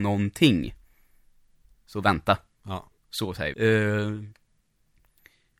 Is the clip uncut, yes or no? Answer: no